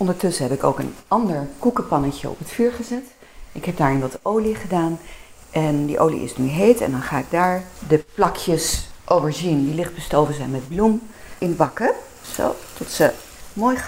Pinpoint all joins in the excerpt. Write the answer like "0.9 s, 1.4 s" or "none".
none